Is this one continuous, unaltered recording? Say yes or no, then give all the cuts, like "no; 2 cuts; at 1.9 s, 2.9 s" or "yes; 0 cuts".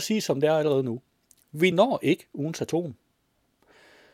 yes; 0 cuts